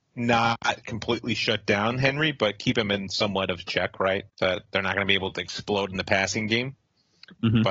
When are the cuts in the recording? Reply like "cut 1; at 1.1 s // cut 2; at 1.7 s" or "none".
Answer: cut 1; at 4.3 s

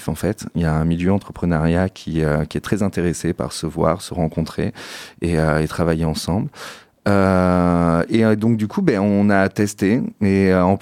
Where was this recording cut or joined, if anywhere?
none

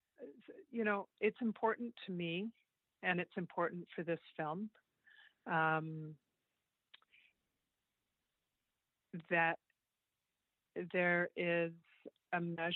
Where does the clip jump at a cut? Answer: none

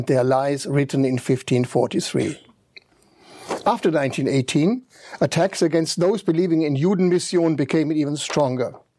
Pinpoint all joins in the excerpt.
none

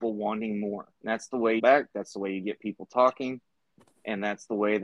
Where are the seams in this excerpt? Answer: cut 1; at 0.9 s // cut 2; at 1.6 s

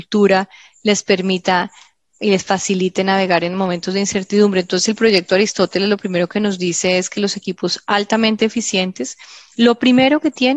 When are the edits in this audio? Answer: none

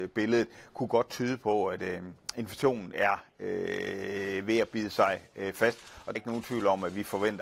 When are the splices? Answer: cut 1; at 6.2 s

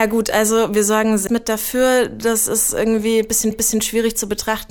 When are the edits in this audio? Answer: cut 1; at 1.3 s // cut 2; at 3.5 s

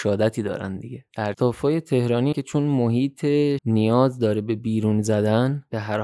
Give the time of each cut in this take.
cut 1; at 1.3 s // cut 2; at 2.3 s // cut 3; at 3.6 s

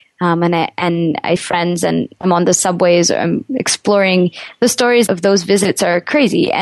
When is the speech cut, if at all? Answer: cut 1; at 1.4 s // cut 2; at 5.1 s

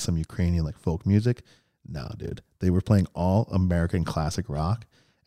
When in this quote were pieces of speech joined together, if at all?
none

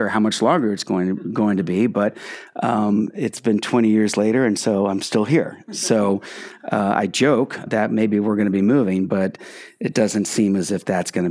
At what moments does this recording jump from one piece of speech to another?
cut 1; at 7.7 s

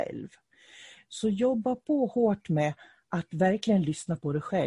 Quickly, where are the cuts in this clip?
none

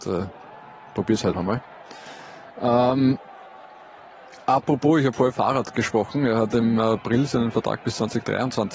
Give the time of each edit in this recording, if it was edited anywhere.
cut 1; at 1.3 s // cut 2; at 5.3 s

